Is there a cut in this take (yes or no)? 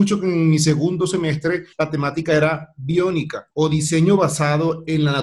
yes